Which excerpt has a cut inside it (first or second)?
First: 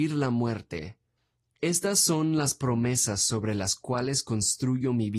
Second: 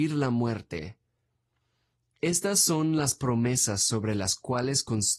first